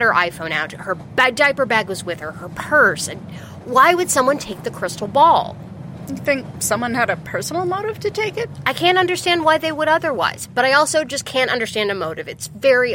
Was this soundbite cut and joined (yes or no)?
no